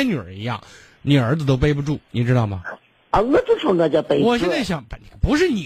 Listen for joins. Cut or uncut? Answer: uncut